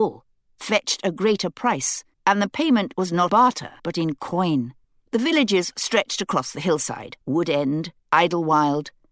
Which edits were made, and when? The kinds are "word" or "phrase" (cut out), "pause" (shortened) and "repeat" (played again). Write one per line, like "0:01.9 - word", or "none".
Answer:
0:02.1 - pause
0:03.3 - word
0:03.8 - pause
0:04.8 - pause
0:07.2 - pause
0:08.0 - pause